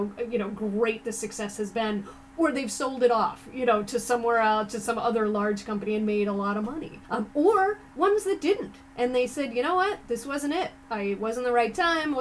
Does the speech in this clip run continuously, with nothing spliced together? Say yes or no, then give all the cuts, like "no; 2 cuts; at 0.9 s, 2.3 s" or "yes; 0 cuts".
no; 2 cuts; at 7.0 s, 7.9 s